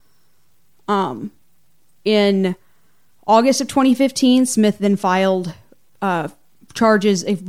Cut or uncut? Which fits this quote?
uncut